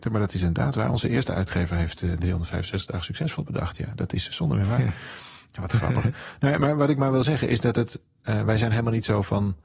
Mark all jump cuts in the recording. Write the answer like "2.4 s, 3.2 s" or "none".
none